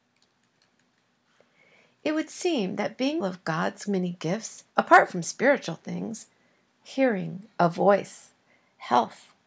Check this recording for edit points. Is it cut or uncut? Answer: cut